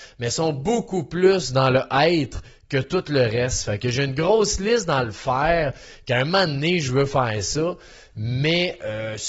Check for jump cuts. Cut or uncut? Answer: uncut